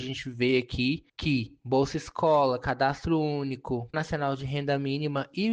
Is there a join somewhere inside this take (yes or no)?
yes